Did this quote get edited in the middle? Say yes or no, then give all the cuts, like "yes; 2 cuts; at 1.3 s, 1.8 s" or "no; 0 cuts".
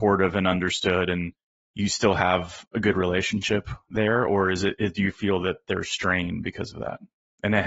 no; 0 cuts